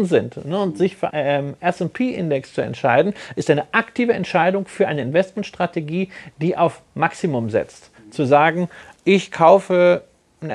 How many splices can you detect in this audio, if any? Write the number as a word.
two